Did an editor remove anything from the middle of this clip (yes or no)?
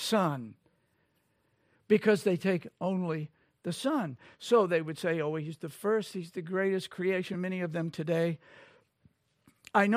no